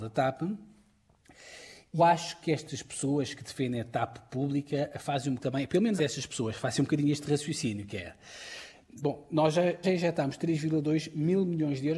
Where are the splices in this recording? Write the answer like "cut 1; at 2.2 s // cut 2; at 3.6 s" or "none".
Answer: cut 1; at 2.0 s // cut 2; at 5.4 s // cut 3; at 6.0 s // cut 4; at 9.8 s